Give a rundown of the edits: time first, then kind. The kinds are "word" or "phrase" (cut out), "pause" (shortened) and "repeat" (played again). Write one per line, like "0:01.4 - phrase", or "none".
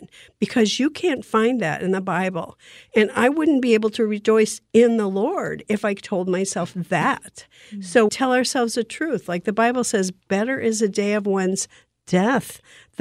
0:08.1 - word